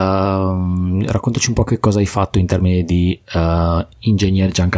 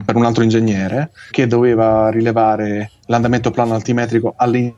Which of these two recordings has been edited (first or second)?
second